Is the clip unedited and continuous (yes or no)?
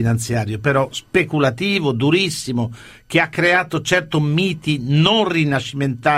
yes